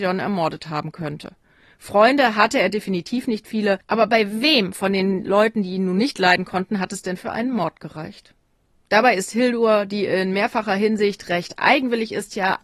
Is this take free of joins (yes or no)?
yes